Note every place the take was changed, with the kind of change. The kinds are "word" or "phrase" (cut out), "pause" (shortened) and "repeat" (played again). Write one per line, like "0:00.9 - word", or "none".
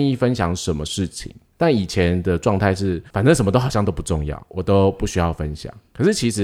0:03.1 - pause

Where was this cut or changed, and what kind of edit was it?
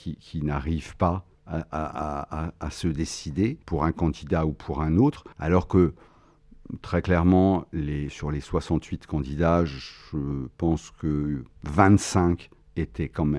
0:01.3 - pause
0:03.6 - pause
0:05.3 - pause

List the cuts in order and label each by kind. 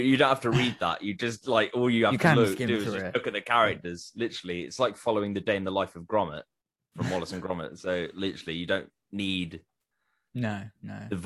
none

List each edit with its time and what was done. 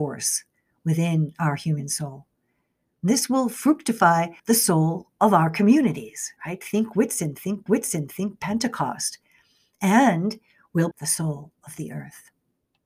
0:04.4 - pause
0:06.4 - pause
0:07.7 - repeat
0:10.9 - word

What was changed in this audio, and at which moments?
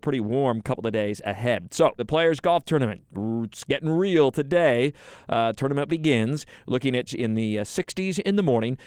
0:02.0 - word
0:05.9 - word
0:07.1 - word

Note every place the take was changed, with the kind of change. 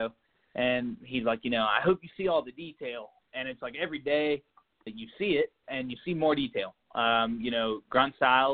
0:04.9 - word

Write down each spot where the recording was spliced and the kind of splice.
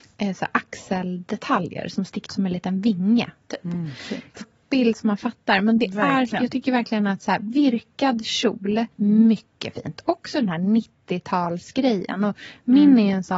0:02.3 - word
0:04.4 - word
0:08.9 - pause

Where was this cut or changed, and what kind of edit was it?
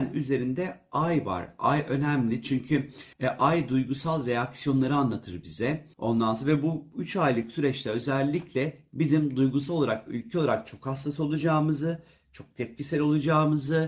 0:03.1 - pause
0:05.9 - pause

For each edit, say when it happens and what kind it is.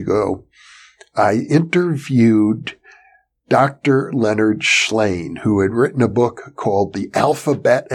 none

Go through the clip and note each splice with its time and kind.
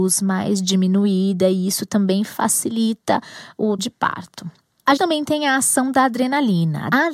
0:03.8 - word
0:05.0 - word

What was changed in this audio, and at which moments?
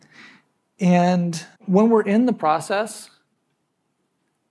0:01.5 - pause

